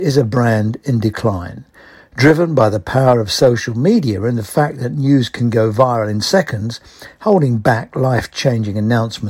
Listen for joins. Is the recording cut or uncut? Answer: uncut